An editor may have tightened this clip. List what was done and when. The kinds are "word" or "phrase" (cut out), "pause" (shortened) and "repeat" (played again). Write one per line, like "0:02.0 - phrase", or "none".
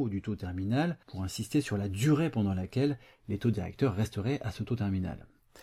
0:01.0 - pause